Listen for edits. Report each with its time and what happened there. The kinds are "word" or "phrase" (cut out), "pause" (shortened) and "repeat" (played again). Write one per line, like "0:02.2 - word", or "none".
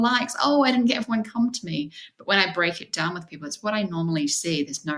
none